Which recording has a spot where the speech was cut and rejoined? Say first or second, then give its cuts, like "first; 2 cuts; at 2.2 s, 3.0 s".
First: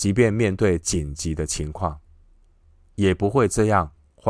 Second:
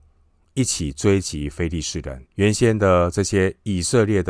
second; 1 cut; at 2.3 s